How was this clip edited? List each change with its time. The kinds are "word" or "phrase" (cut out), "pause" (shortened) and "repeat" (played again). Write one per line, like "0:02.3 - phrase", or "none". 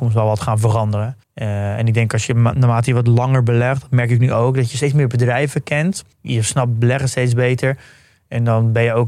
0:01.2 - pause
0:06.1 - pause

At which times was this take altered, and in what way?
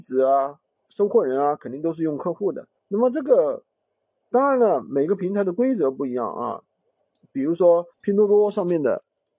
0:02.8 - pause
0:07.9 - pause

